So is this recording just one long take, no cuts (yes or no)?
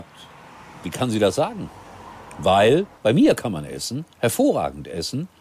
no